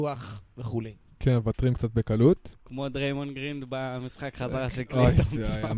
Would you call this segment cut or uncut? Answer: uncut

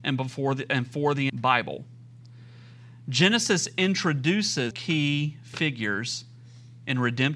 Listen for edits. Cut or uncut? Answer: cut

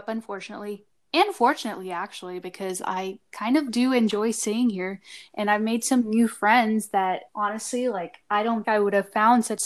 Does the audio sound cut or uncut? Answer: cut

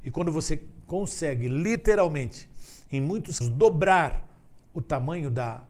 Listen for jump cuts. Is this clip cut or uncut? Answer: cut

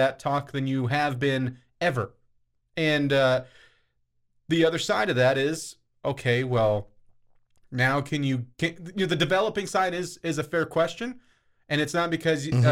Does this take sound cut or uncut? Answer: uncut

